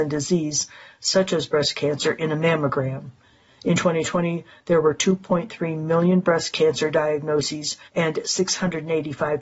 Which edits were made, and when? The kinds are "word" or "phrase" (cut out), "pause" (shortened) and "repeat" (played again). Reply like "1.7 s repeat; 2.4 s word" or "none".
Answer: 7.9 s pause